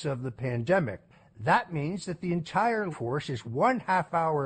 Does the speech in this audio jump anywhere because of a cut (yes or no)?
yes